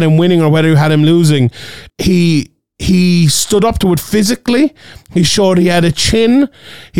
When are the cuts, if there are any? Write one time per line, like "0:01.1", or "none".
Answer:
0:01.9

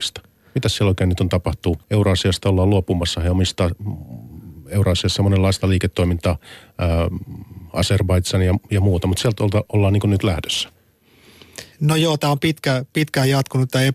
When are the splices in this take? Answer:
0:01.8
0:11.7

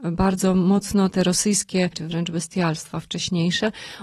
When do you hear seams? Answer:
0:01.9

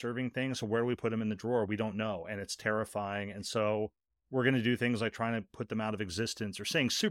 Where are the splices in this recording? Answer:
none

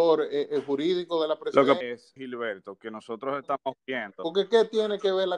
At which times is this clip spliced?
0:01.8
0:02.2

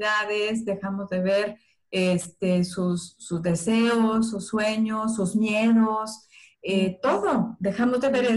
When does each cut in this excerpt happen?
none

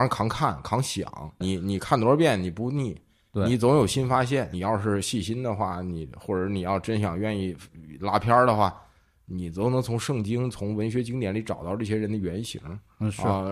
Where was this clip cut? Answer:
0:01.4

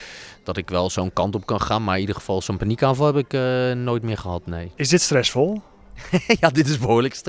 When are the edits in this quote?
none

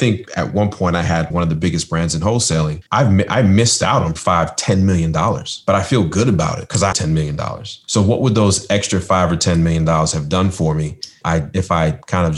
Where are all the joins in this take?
0:01.3
0:02.9
0:04.2
0:06.9
0:11.2

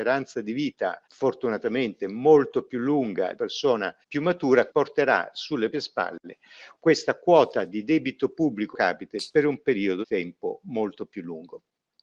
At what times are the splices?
0:01.0
0:03.3
0:04.0
0:04.7
0:05.7
0:06.8
0:08.7
0:10.0

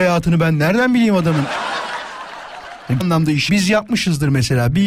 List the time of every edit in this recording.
0:03.0
0:03.5

